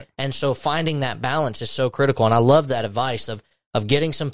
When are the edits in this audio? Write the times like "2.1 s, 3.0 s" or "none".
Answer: none